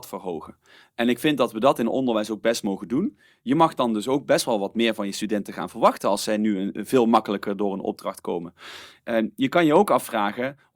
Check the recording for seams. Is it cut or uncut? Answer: uncut